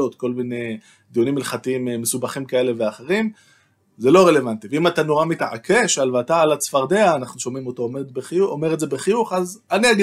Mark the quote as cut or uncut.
uncut